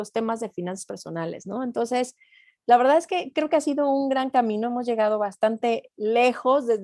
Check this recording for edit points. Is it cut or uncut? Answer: uncut